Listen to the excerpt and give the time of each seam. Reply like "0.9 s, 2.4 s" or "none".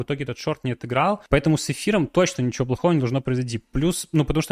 1.3 s